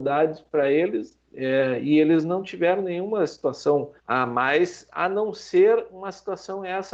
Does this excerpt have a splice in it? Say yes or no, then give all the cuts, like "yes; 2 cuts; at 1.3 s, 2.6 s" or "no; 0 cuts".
yes; 1 cut; at 4.0 s